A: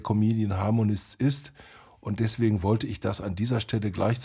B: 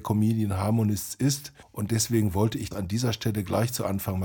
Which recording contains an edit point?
B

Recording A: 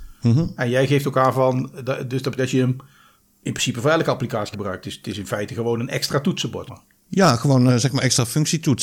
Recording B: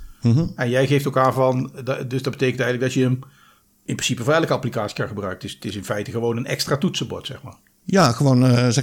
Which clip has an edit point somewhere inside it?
A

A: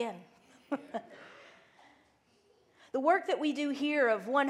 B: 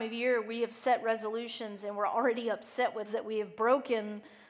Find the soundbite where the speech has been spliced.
B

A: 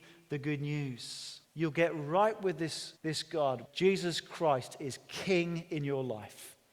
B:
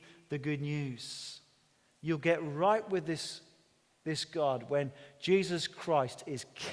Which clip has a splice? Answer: A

